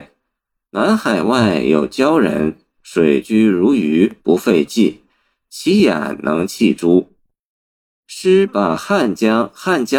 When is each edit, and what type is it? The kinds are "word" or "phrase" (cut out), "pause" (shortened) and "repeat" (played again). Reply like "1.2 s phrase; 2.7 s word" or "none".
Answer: 4.2 s pause